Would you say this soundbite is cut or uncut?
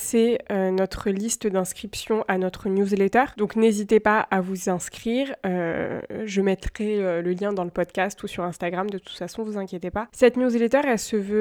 uncut